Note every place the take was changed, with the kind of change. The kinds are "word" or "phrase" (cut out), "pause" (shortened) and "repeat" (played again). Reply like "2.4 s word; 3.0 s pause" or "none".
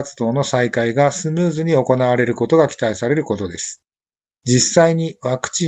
none